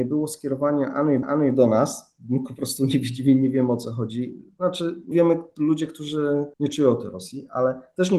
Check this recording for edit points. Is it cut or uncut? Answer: cut